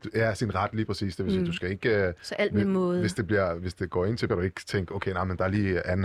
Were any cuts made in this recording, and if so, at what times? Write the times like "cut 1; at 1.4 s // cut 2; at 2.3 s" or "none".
cut 1; at 4.3 s